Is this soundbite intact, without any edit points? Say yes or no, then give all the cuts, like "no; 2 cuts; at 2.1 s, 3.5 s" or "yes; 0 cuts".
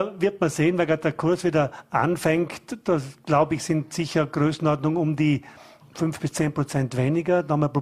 yes; 0 cuts